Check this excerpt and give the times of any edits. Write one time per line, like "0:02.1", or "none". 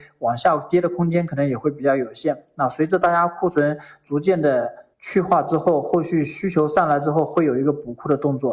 0:04.9